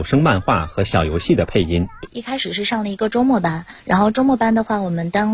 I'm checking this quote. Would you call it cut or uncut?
cut